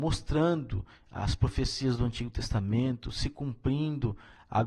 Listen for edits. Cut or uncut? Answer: uncut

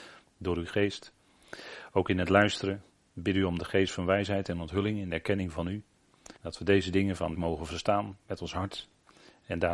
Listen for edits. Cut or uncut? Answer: cut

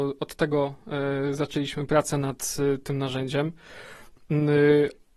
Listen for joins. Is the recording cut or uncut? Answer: uncut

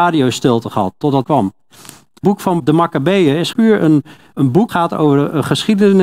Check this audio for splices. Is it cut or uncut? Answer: cut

